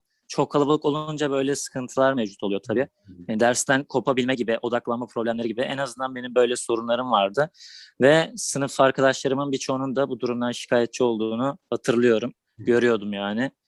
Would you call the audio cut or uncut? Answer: uncut